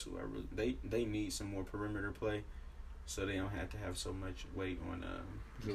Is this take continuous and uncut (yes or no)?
yes